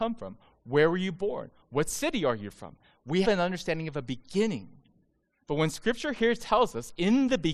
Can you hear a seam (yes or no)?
yes